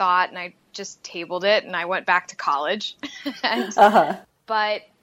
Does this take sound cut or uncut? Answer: uncut